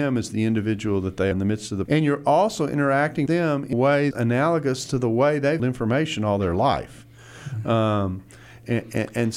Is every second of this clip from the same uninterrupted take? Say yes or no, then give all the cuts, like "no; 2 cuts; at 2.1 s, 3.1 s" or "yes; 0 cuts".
no; 6 cuts; at 1.3 s, 1.9 s, 3.3 s, 3.7 s, 4.1 s, 5.6 s